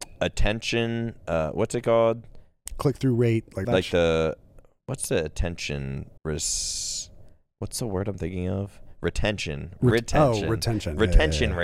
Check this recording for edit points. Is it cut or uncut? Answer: cut